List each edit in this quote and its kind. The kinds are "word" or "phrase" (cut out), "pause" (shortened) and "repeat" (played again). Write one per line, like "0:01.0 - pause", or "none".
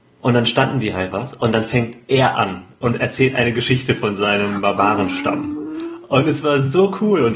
0:01.1 - phrase

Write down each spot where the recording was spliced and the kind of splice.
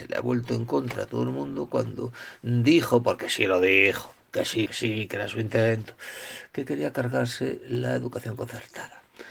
0:04.7 - word

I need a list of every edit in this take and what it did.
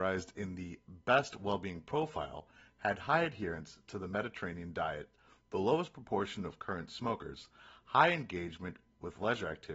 none

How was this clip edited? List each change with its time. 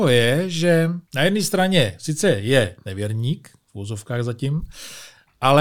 0:01.0 - pause

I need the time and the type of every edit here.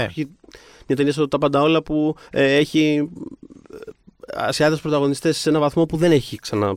0:02.2 - pause

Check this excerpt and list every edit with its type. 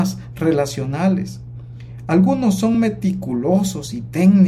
none

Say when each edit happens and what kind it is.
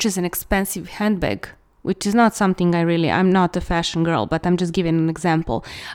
none

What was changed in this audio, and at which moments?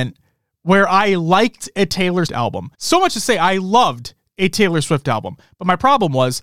0:02.3 - word
0:02.7 - pause

